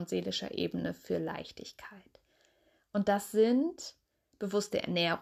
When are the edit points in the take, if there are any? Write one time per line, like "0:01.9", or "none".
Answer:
none